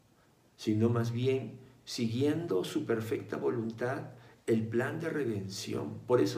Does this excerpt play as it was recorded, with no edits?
yes; 0 cuts

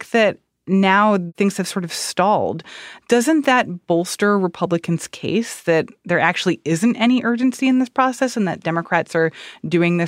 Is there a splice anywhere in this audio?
no; 0 cuts

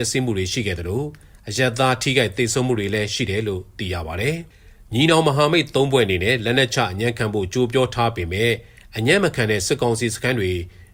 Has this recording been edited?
no; 0 cuts

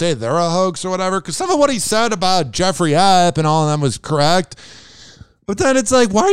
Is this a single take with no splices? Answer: yes; 0 cuts

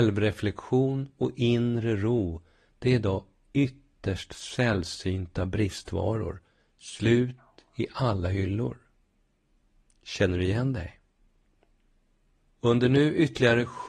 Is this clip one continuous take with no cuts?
yes; 0 cuts

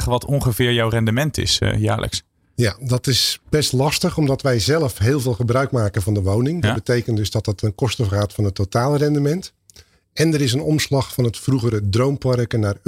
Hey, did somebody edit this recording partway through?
no; 0 cuts

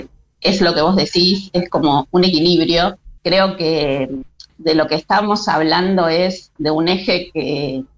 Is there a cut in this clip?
yes; 2 cuts; at 3.2 s, 4.5 s

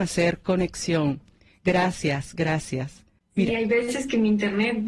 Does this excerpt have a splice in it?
no; 0 cuts

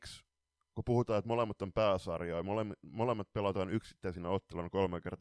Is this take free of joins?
yes; 0 cuts

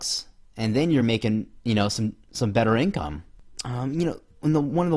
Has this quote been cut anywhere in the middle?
no; 0 cuts

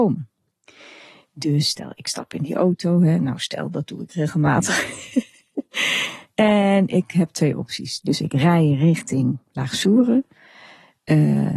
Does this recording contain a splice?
no; 0 cuts

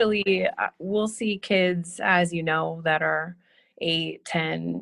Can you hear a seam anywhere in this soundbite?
no; 0 cuts

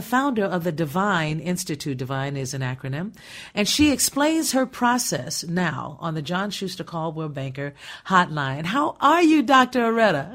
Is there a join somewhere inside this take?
no; 0 cuts

